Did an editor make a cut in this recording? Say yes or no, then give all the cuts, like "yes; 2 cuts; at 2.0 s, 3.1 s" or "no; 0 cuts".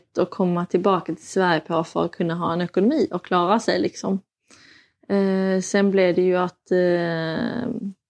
no; 0 cuts